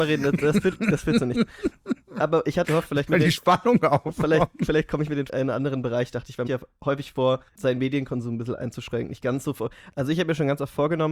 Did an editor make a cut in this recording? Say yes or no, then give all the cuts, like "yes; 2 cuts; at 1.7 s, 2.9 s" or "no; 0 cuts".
yes; 5 cuts; at 2.6 s, 3.1 s, 5.3 s, 6.5 s, 7.5 s